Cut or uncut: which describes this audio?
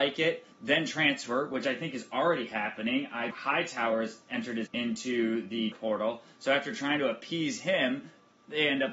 cut